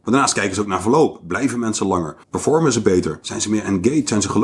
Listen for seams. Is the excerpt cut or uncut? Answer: cut